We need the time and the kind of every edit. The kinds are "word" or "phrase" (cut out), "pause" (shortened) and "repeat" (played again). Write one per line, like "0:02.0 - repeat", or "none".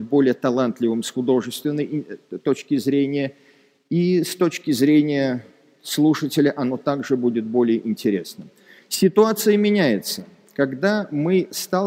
none